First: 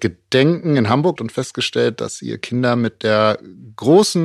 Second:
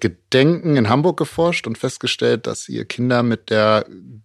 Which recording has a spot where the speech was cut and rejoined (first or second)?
first